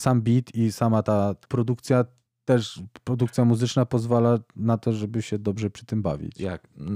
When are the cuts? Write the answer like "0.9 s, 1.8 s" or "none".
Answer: 1.4 s

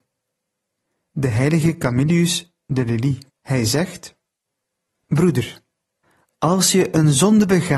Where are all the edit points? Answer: 3.3 s

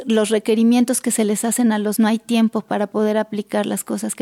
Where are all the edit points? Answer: 2.0 s

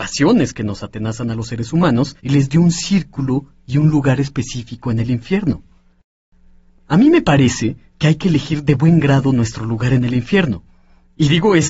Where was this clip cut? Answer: 2.2 s

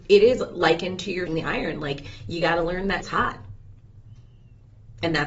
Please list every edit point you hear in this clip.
1.3 s, 3.0 s

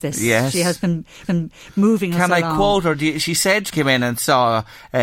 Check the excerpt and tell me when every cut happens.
1.2 s, 3.7 s

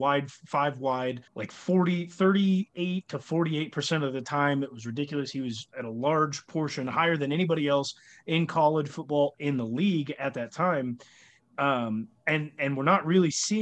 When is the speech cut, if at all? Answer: 1.3 s, 5.7 s, 9.3 s

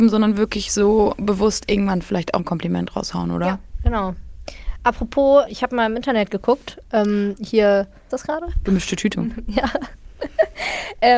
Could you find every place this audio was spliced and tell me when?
2.4 s, 5.5 s, 8.1 s, 9.1 s

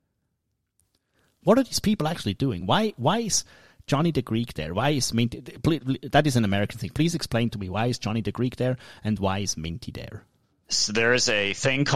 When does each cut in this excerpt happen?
none

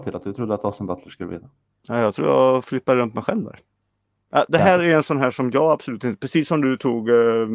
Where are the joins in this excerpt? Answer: none

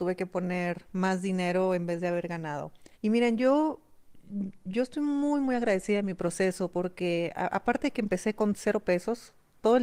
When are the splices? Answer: 2.9 s

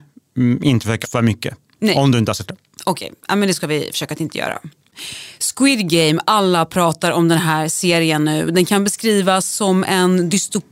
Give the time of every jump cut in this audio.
1.0 s, 2.5 s

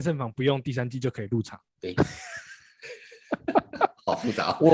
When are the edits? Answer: 1.7 s

